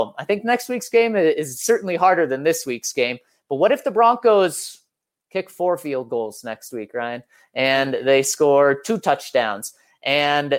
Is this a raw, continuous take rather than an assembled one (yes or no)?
yes